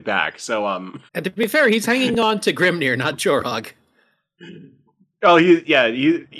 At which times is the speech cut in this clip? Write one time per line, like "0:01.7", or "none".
0:01.1

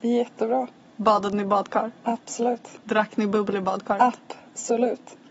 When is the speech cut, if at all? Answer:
none

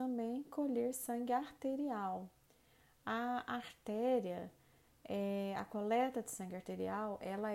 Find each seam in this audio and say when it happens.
none

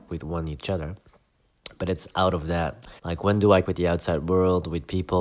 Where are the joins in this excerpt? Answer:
0:03.0
0:03.6

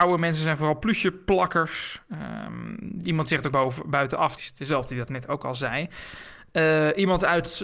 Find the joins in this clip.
0:03.5
0:04.4

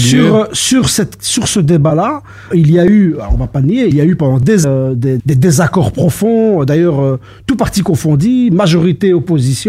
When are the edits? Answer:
0:02.5
0:03.9
0:04.6
0:05.2

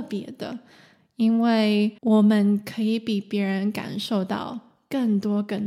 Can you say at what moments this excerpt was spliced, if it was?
0:02.0

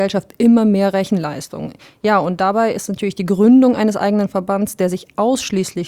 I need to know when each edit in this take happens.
none

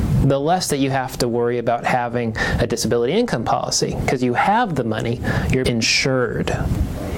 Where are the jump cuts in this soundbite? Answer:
0:05.6

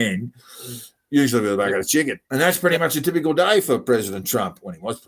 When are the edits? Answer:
0:02.2

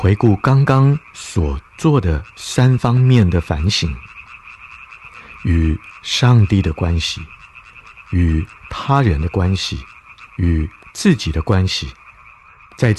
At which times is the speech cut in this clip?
0:10.3

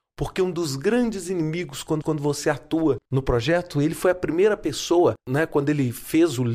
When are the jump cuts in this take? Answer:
0:02.0
0:03.1
0:05.2

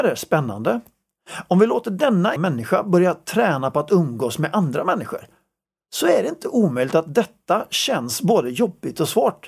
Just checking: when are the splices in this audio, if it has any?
0:02.4

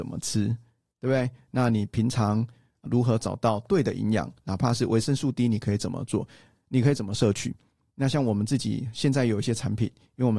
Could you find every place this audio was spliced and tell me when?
none

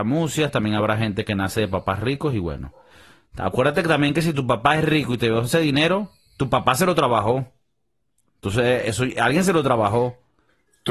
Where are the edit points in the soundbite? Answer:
none

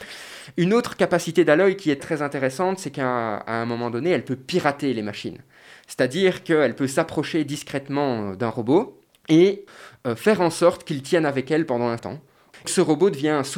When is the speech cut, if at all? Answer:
0:02.0
0:12.0
0:12.6

